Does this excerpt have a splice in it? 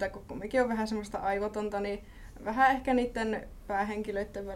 no; 0 cuts

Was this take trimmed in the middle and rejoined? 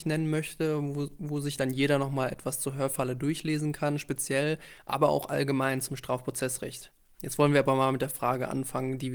no; 0 cuts

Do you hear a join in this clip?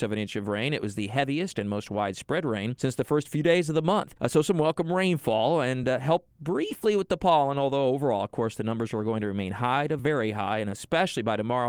no; 0 cuts

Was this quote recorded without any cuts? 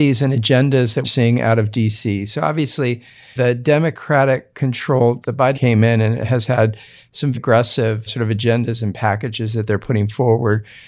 no; 6 cuts; at 1.0 s, 3.4 s, 5.2 s, 5.5 s, 7.3 s, 8.1 s

